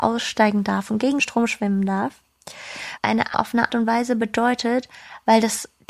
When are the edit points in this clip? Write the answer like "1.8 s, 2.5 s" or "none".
1.2 s, 3.0 s, 3.3 s, 3.7 s